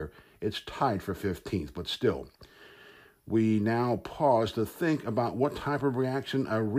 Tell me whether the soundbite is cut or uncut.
uncut